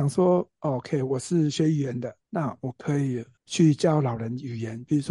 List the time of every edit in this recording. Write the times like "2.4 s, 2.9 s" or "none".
2.2 s, 3.4 s